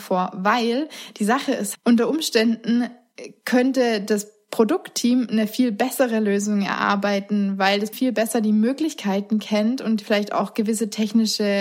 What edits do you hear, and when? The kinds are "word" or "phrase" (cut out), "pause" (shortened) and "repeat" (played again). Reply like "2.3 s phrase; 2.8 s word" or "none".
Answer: 1.7 s word; 7.9 s word

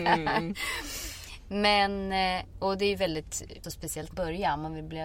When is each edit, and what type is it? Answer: 3.6 s word; 4.1 s phrase

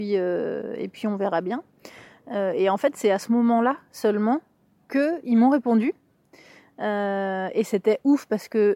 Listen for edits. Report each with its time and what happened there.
none

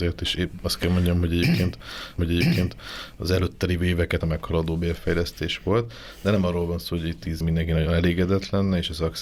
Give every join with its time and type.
2.2 s repeat; 4.2 s word; 7.4 s word

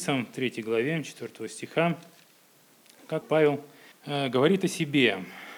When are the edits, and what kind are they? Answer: 3.2 s word; 3.9 s pause

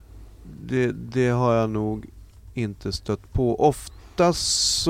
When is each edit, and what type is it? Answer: none

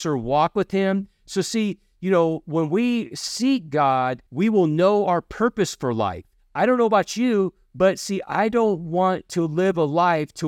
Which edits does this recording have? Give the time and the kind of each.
4.3 s pause; 6.4 s pause

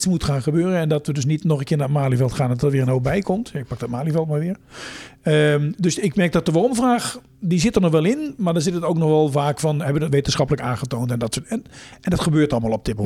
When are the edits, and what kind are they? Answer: none

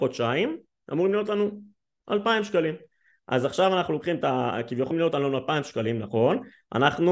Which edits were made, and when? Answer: 4.9 s word

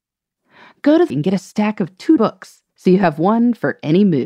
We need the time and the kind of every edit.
1.1 s word; 2.2 s word; 2.7 s pause

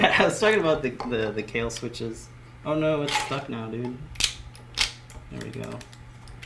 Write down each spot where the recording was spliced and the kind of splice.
none

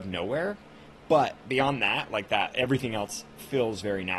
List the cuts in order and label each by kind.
1.4 s pause

